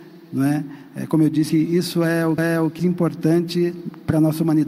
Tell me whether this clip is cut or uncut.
cut